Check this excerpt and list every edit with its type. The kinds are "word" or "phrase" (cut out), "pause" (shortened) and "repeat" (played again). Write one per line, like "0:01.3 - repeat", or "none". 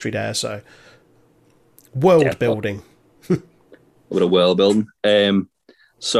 none

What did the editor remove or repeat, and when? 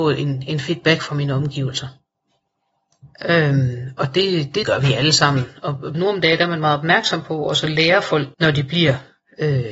0:03.1 - pause
0:04.6 - phrase
0:05.9 - phrase
0:08.3 - phrase

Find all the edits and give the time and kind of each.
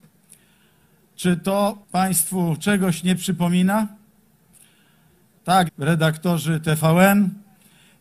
0:01.8 - pause
0:05.7 - phrase

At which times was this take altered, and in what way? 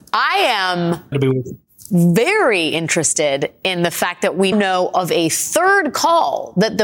0:01.1 - word
0:04.5 - word

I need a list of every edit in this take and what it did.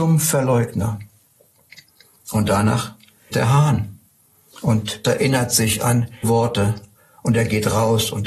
0:03.3 - word
0:05.0 - word
0:06.2 - word

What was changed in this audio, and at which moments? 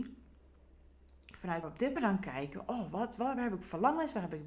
0:01.6 - word
0:02.0 - phrase

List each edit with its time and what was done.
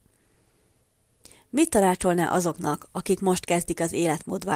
none

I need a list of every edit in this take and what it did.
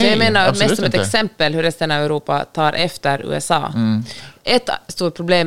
none

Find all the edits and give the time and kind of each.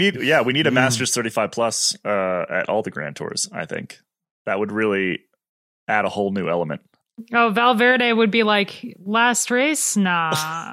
none

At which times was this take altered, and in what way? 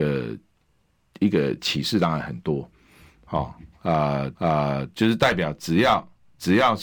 0:04.4 - repeat

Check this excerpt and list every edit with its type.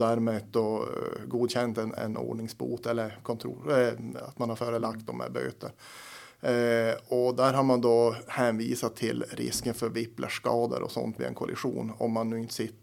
0:02.0 - word

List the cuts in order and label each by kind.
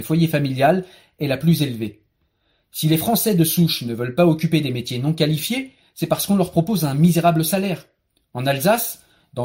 none

